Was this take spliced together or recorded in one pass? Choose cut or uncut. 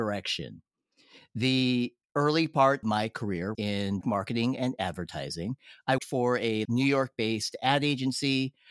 cut